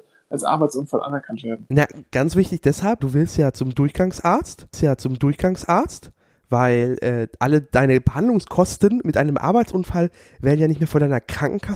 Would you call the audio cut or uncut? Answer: cut